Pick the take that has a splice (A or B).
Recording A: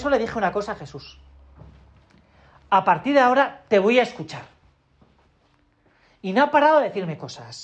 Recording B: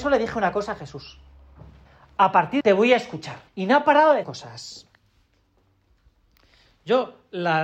B